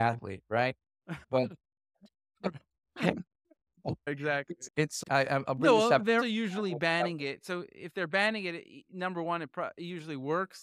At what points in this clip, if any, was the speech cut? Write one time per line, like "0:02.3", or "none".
0:05.0
0:06.2